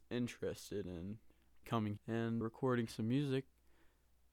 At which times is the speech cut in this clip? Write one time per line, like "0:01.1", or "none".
0:01.6
0:02.0
0:02.4